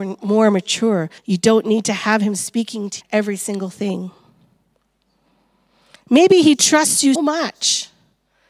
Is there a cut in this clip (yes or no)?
yes